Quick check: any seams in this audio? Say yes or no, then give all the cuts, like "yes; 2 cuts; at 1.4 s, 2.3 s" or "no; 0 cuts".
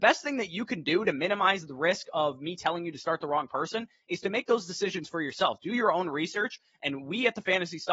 no; 0 cuts